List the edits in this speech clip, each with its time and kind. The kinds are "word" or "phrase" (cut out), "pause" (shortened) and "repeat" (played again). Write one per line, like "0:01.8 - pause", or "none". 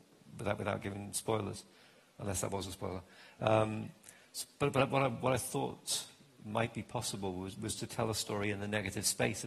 none